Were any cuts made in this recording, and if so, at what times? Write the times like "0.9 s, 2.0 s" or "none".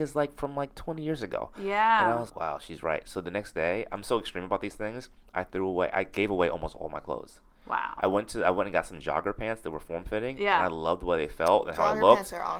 2.3 s

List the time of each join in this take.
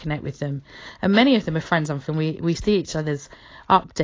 2.0 s

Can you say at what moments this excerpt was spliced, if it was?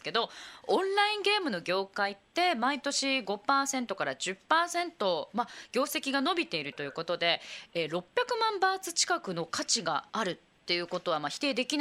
10.1 s

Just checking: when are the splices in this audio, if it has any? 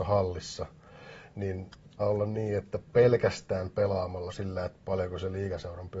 2.0 s, 4.3 s

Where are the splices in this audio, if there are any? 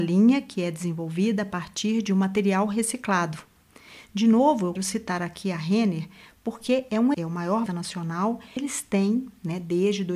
4.8 s, 7.1 s, 7.7 s, 8.6 s

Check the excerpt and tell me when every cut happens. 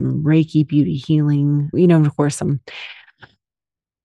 1.7 s

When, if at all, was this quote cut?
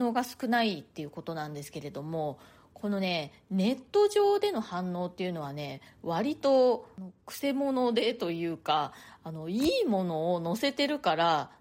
none

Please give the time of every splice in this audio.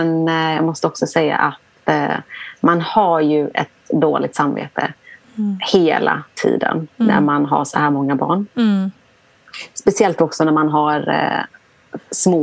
none

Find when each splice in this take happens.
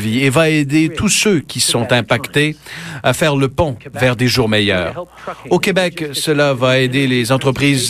none

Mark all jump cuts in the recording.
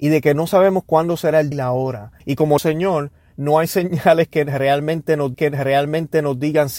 1.5 s, 2.2 s, 2.6 s, 5.3 s

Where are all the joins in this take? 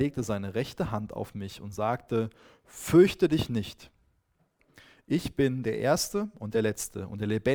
none

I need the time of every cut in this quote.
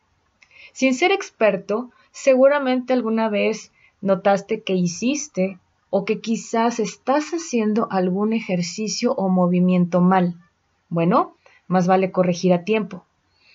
none

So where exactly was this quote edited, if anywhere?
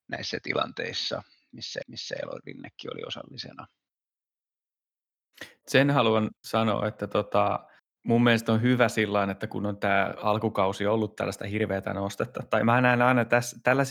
1.8 s, 6.4 s, 7.8 s

